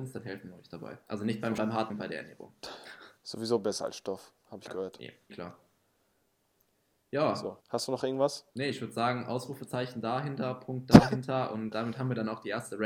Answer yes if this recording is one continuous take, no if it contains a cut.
no